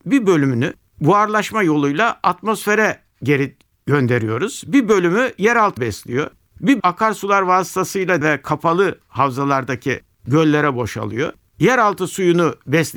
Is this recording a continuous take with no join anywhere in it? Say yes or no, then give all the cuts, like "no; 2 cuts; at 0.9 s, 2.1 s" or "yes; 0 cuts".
no; 3 cuts; at 5.8 s, 6.8 s, 8.2 s